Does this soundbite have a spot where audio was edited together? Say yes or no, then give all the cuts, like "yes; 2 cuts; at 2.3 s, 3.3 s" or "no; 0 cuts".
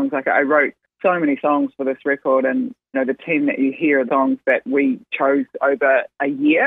yes; 2 cuts; at 2.9 s, 4.1 s